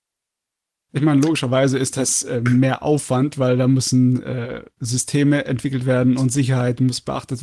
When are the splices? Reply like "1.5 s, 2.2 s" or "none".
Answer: none